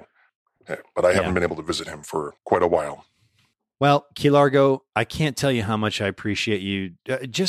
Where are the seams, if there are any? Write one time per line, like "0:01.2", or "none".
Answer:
0:02.4